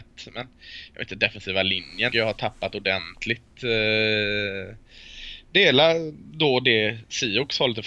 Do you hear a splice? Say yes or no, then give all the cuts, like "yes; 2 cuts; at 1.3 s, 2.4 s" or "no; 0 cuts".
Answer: yes; 1 cut; at 2.1 s